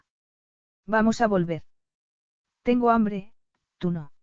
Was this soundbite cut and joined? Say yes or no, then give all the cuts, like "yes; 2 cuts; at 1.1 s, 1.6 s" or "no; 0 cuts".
no; 0 cuts